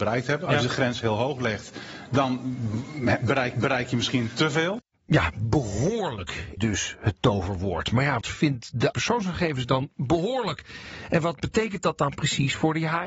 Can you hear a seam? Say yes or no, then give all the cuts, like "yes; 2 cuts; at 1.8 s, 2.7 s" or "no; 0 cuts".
yes; 4 cuts; at 3.5 s, 6.6 s, 8.2 s, 8.9 s